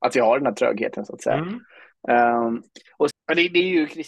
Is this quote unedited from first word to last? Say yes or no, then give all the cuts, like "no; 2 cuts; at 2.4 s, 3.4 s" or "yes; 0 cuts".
no; 1 cut; at 3.1 s